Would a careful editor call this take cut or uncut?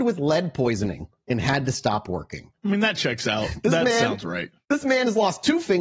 cut